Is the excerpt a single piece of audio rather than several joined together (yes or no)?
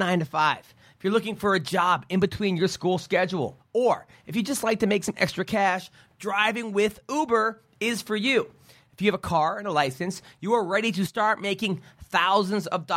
yes